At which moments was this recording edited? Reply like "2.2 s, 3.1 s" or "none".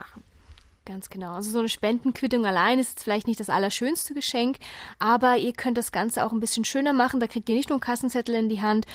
none